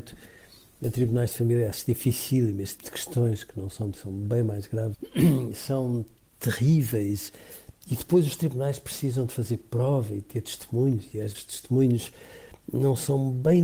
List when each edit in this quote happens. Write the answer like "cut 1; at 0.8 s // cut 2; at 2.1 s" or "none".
cut 1; at 2.8 s // cut 2; at 3.9 s // cut 3; at 4.9 s // cut 4; at 11.3 s